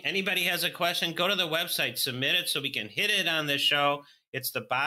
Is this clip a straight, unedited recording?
yes; 0 cuts

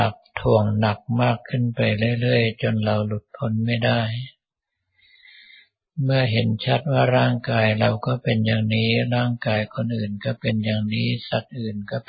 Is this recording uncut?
yes; 0 cuts

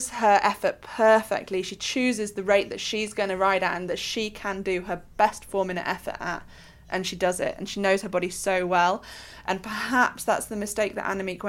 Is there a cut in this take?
no; 0 cuts

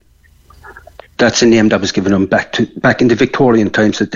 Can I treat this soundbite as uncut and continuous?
yes; 0 cuts

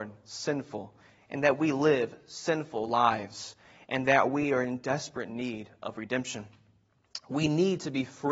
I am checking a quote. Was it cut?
no; 0 cuts

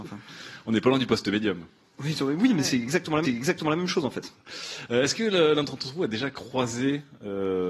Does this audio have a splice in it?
yes; 1 cut; at 3.2 s

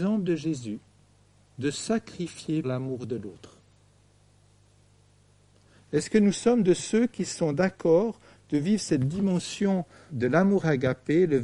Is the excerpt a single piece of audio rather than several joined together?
no; 3 cuts; at 1.7 s, 2.6 s, 10.1 s

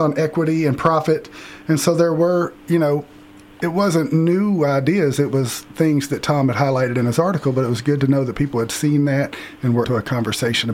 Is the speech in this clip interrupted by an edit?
yes; 1 cut; at 9.8 s

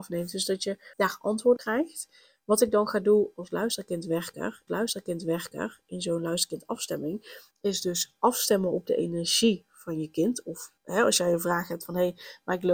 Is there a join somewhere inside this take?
yes; 6 cuts; at 0.9 s, 1.6 s, 3.3 s, 4.7 s, 7.5 s, 10.8 s

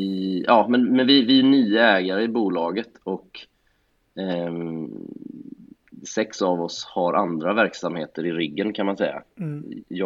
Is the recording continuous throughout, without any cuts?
yes; 0 cuts

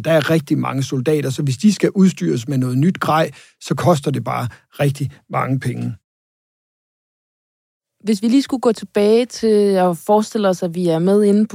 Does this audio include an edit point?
no; 0 cuts

